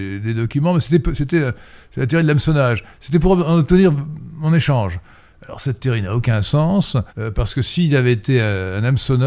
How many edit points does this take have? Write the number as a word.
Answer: one